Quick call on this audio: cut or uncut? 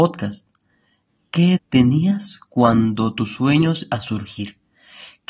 cut